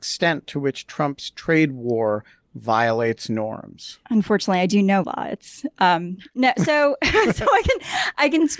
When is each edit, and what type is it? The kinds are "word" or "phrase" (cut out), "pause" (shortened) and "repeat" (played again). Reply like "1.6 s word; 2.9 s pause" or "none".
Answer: 5.0 s phrase

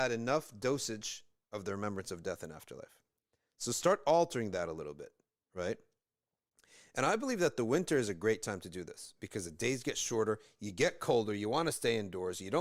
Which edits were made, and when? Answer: none

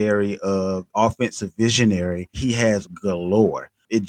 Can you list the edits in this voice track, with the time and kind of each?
0.9 s word; 2.3 s word; 2.8 s word

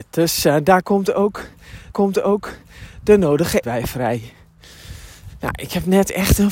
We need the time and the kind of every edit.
1.9 s repeat; 3.6 s word

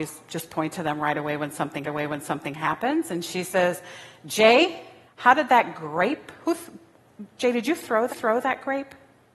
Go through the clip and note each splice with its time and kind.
1.8 s repeat; 5.1 s pause; 8.1 s repeat

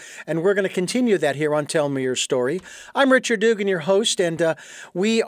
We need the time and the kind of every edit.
none

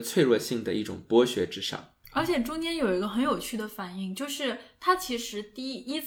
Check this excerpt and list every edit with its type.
2.0 s pause

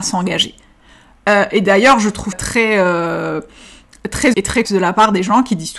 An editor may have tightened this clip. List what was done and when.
2.3 s word; 4.3 s word; 4.6 s word

